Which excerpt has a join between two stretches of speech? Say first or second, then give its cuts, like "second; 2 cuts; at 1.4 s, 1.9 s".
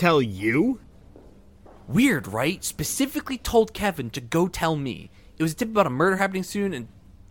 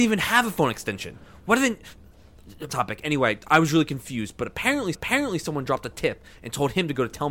second; 3 cuts; at 2.7 s, 3.5 s, 4.9 s